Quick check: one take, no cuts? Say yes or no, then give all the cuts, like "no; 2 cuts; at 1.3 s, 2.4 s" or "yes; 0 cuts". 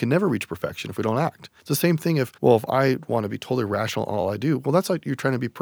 no; 2 cuts; at 1.6 s, 2.4 s